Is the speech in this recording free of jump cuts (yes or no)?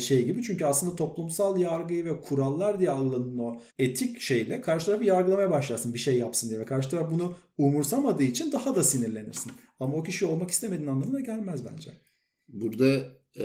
no